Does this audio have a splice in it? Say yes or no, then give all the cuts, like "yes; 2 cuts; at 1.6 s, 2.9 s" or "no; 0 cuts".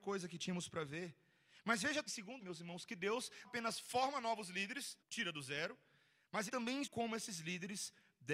yes; 6 cuts; at 2.1 s, 2.4 s, 3.4 s, 5.0 s, 6.5 s, 6.8 s